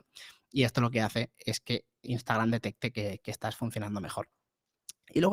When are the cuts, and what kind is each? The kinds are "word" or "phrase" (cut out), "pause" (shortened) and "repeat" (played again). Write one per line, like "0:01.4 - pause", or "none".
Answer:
none